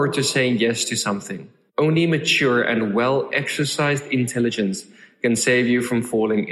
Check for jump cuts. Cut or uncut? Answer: uncut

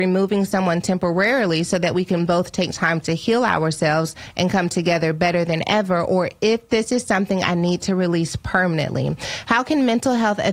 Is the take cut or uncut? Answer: uncut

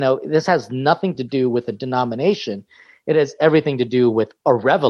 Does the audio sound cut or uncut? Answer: uncut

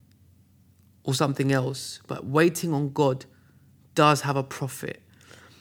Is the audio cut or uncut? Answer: uncut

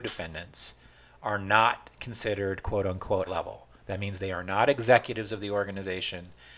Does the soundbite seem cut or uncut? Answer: cut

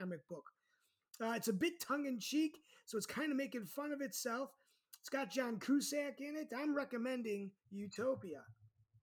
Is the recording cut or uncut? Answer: cut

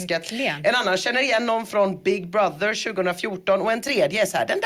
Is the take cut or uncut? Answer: uncut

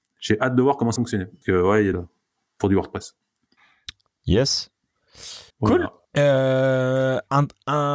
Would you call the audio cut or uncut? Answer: cut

